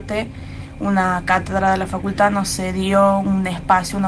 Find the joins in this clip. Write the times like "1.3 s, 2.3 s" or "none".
none